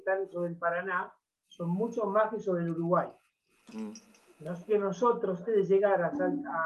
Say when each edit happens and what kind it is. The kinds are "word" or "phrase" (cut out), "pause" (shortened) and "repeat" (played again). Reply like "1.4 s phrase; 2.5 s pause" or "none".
4.7 s word; 5.5 s word